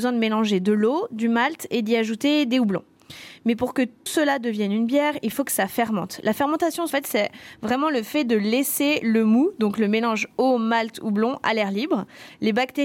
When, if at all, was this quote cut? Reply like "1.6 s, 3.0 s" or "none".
4.1 s, 6.9 s